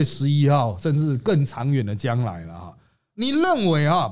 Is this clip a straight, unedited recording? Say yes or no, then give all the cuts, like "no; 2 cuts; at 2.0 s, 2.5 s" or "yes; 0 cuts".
yes; 0 cuts